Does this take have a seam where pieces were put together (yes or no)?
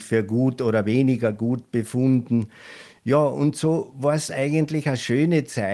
no